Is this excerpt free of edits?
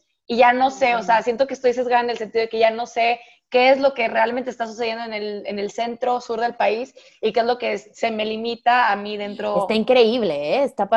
yes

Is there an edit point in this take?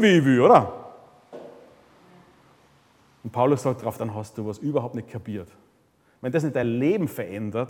no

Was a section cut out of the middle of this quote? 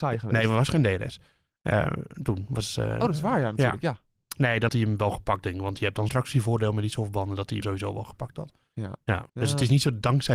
yes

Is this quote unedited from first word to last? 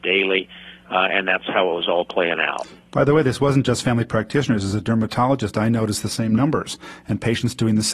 yes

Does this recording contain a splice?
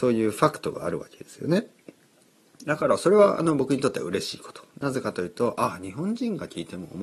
no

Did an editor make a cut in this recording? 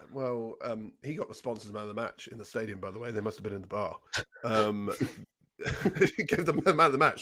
yes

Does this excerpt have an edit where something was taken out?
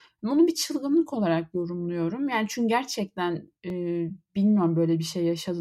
yes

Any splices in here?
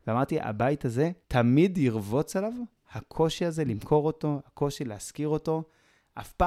yes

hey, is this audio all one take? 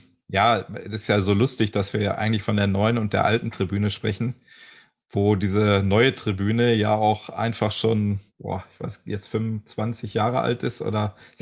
no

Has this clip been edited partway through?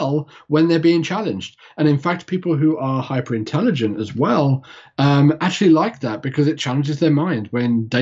no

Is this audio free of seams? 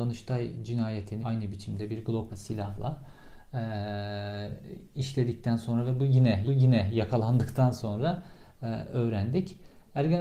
no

